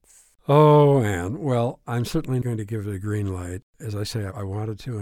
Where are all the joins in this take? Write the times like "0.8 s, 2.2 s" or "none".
2.4 s